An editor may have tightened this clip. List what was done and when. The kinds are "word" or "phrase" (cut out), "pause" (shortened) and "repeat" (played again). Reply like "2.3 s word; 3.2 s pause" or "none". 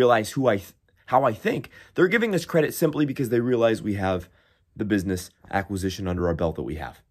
none